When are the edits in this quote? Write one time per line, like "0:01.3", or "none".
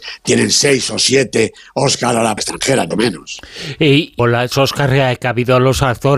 0:02.4
0:02.9
0:04.2
0:04.5